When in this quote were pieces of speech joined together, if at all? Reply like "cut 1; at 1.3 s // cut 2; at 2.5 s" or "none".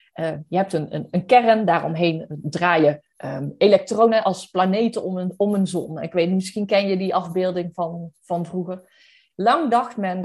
none